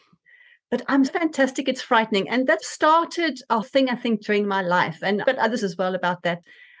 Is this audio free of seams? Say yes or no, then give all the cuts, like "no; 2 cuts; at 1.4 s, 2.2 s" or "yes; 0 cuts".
no; 5 cuts; at 1.1 s, 2.6 s, 3.6 s, 5.2 s, 5.6 s